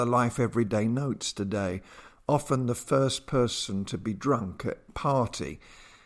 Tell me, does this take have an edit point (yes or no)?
yes